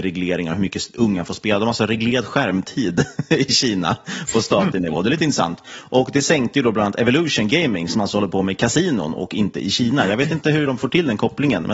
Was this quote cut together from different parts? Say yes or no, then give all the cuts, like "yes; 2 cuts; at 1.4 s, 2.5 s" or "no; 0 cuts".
no; 0 cuts